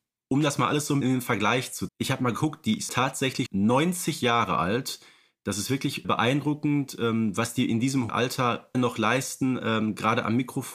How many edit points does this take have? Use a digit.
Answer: 7